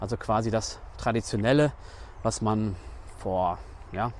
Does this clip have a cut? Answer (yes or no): no